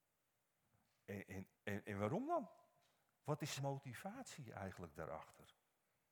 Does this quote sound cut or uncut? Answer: cut